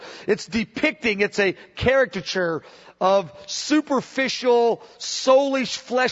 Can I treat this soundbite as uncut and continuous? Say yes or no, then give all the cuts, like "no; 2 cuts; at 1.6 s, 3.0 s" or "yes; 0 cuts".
yes; 0 cuts